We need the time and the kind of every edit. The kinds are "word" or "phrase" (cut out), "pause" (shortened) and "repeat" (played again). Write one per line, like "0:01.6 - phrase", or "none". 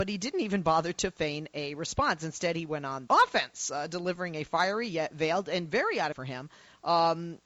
0:03.1 - word
0:06.1 - phrase

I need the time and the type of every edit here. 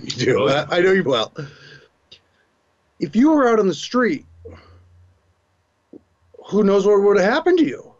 0:01.0 - word

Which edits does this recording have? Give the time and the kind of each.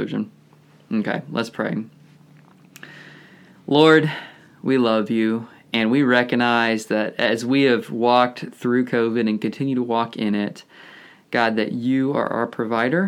none

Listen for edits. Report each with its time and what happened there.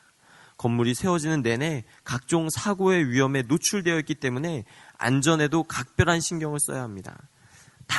none

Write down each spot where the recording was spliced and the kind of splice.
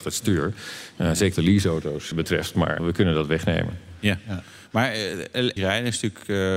0:01.3 - word
0:02.1 - word
0:02.8 - word
0:05.6 - word

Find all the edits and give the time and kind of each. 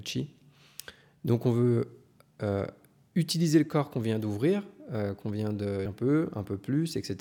0:05.9 - word

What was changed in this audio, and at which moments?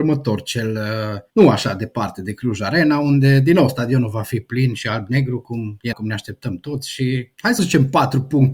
0:05.9 - word
0:07.6 - word

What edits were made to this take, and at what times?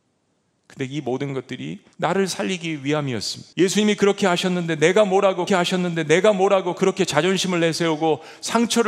0:01.9 - pause
0:03.5 - pause
0:05.5 - repeat

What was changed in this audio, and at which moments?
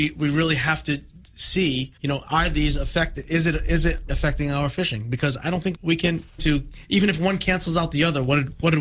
0:02.0 - pause
0:04.1 - word
0:05.7 - word
0:06.4 - phrase

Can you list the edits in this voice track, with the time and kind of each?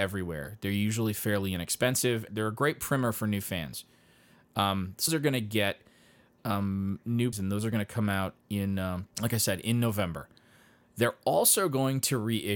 0:02.3 - phrase
0:05.1 - word
0:07.3 - word
0:09.1 - pause

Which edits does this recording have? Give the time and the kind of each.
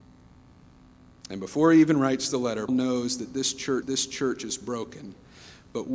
0:02.7 - word
0:03.8 - repeat

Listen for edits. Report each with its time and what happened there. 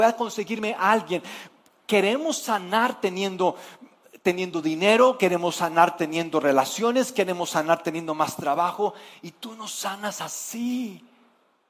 none

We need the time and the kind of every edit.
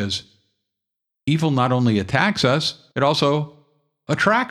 0:02.9 - pause

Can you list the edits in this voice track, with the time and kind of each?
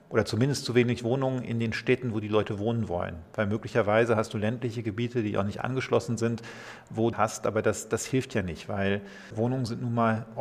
0:07.1 - phrase

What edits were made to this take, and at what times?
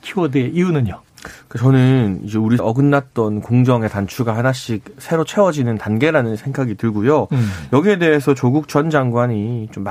0:02.6 - word

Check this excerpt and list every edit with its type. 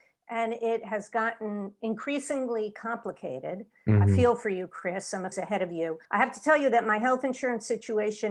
0:05.3 - phrase
0:06.0 - pause

